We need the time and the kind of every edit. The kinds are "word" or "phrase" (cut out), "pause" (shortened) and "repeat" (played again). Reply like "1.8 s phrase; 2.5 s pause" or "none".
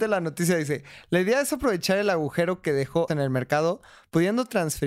3.1 s word